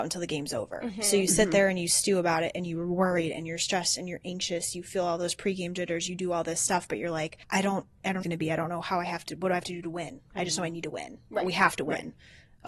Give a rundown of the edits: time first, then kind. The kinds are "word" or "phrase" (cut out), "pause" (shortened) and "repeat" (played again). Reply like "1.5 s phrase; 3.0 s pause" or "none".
7.4 s pause; 8.2 s phrase